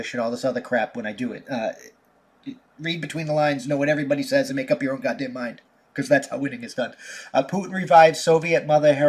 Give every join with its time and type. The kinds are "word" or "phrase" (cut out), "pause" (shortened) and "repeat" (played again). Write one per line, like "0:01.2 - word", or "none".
none